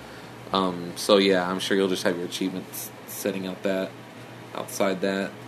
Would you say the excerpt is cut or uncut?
uncut